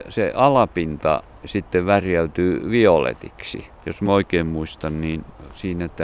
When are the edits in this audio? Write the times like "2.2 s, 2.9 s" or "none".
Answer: none